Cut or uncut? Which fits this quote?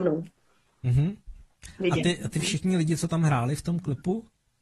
uncut